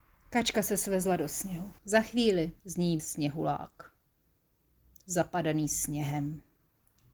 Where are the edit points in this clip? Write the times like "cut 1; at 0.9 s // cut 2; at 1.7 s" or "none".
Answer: cut 1; at 1.8 s // cut 2; at 2.6 s // cut 3; at 3.0 s